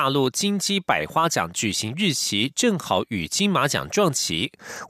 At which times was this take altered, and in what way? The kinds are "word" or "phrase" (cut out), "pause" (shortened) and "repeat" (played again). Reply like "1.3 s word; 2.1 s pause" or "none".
none